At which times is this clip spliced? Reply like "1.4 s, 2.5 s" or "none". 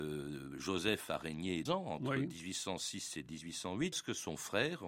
1.7 s, 3.9 s